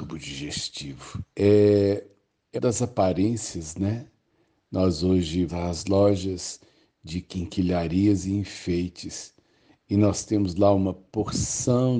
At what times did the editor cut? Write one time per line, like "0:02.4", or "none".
0:01.3
0:02.6
0:05.5